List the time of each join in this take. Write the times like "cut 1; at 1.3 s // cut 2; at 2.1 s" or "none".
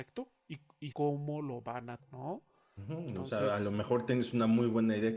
cut 1; at 0.9 s // cut 2; at 2.0 s

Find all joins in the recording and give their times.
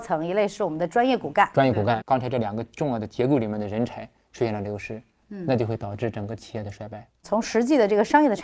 cut 1; at 2.0 s

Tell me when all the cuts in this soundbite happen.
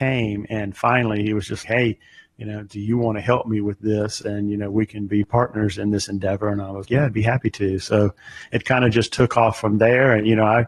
cut 1; at 1.6 s // cut 2; at 6.9 s

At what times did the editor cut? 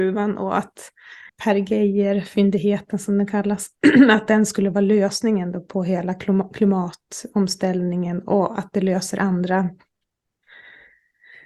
cut 1; at 1.3 s

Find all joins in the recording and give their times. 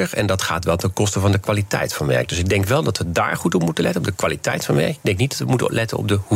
none

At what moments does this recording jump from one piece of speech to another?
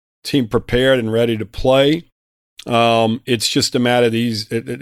none

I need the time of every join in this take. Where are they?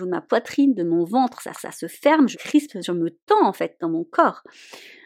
cut 1; at 1.5 s // cut 2; at 2.3 s

